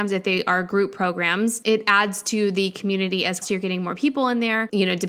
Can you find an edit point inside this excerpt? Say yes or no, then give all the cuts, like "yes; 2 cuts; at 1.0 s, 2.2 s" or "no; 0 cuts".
yes; 1 cut; at 3.4 s